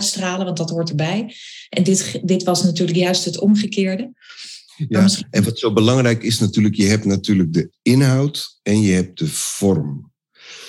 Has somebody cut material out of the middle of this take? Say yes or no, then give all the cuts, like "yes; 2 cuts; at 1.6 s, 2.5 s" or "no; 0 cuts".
no; 0 cuts